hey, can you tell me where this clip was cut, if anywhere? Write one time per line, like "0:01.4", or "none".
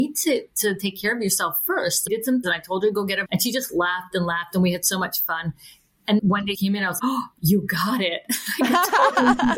0:02.1
0:02.4
0:03.3
0:06.2
0:06.5
0:07.0